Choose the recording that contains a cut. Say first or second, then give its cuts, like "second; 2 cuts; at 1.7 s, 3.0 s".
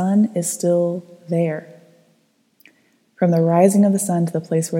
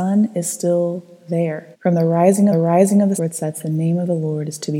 second; 3 cuts; at 1.7 s, 2.5 s, 3.2 s